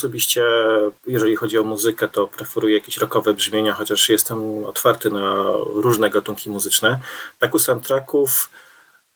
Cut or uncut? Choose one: cut